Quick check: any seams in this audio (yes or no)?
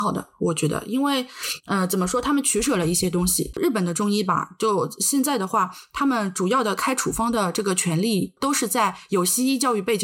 no